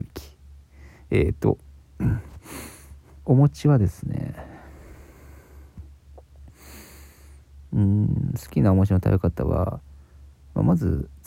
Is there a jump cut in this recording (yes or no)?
no